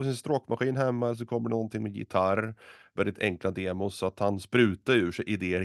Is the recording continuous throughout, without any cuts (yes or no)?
yes